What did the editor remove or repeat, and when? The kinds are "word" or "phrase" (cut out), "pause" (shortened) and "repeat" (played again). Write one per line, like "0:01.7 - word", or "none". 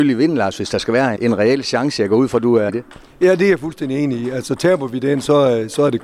0:01.2 - word
0:02.7 - word